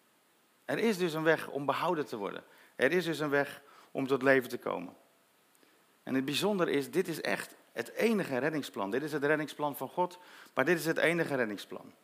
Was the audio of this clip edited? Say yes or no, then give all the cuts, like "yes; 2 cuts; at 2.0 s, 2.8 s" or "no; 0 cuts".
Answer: no; 0 cuts